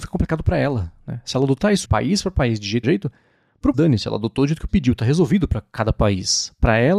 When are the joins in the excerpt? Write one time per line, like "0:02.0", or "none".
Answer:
0:01.8
0:02.8
0:03.7
0:04.7